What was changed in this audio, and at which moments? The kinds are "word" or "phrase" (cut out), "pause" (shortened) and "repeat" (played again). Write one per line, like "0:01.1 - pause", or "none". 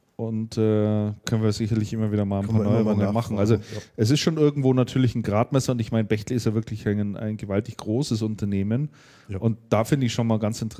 0:01.2 - word